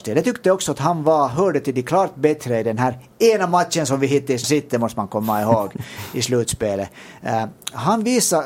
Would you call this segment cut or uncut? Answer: cut